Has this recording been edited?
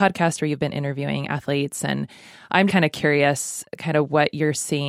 yes; 1 cut; at 2.7 s

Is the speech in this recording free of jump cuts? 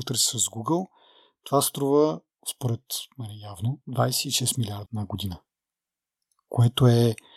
no; 2 cuts; at 3.8 s, 4.9 s

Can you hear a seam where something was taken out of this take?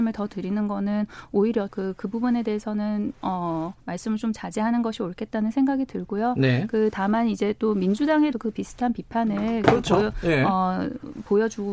yes; 3 cuts; at 1.7 s, 3.8 s, 8.3 s

